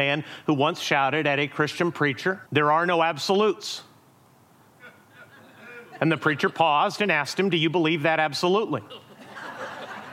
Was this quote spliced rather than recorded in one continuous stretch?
yes; 1 cut; at 2.5 s

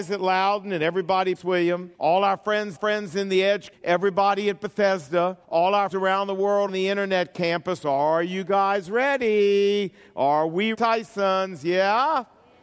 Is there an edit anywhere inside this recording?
yes; 8 cuts; at 1.3 s, 1.9 s, 2.7 s, 3.7 s, 5.4 s, 5.9 s, 6.7 s, 10.7 s

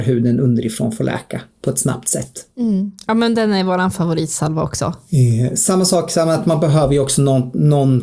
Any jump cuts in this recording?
yes; 1 cut; at 2.5 s

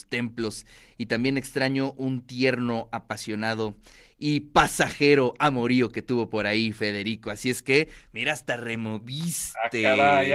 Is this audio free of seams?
yes; 0 cuts

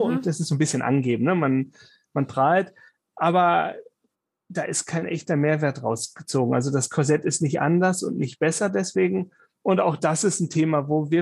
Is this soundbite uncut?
yes; 0 cuts

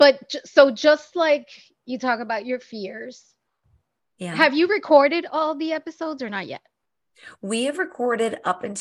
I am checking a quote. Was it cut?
no; 0 cuts

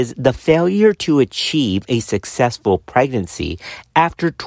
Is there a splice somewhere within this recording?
no; 0 cuts

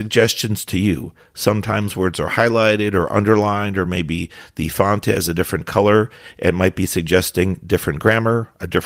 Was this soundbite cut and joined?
no; 0 cuts

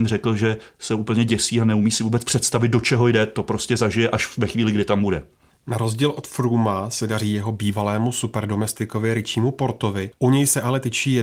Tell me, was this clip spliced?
no; 0 cuts

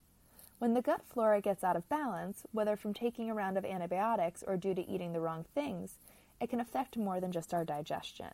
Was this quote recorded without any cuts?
yes; 0 cuts

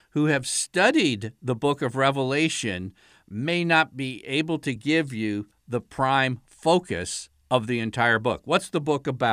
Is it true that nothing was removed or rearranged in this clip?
yes; 0 cuts

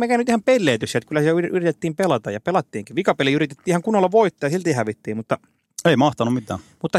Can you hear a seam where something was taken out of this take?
no; 0 cuts

